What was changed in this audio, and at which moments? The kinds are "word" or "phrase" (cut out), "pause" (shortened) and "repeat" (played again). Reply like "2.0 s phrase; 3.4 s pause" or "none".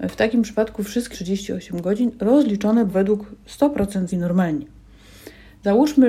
1.1 s phrase; 2.9 s word; 4.1 s word